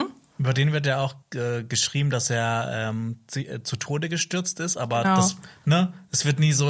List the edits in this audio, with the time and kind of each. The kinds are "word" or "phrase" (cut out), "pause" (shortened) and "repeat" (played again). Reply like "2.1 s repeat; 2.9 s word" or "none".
1.2 s pause